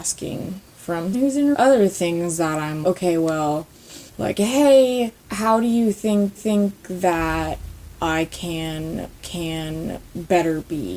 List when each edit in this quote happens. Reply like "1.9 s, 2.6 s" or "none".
1.1 s, 1.5 s, 2.8 s, 4.1 s, 5.2 s, 6.4 s, 9.2 s